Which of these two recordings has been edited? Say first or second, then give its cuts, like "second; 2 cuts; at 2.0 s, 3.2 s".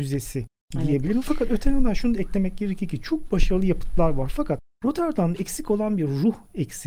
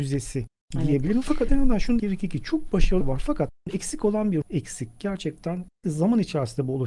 second; 6 cuts; at 1.5 s, 2.0 s, 3.0 s, 3.7 s, 4.4 s, 5.8 s